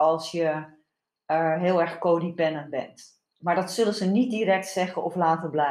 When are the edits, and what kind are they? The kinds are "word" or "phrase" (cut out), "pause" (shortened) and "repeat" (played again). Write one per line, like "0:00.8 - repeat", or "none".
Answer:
0:03.3 - pause